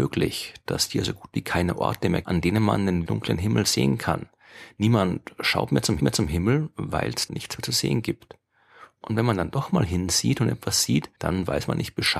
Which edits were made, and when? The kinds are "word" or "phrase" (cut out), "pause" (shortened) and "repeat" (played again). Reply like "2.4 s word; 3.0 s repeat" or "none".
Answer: 2.2 s word; 3.1 s word; 6.0 s repeat; 7.3 s word; 11.1 s pause